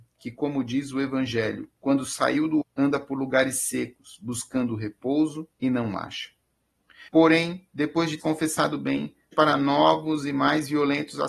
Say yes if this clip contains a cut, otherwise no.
yes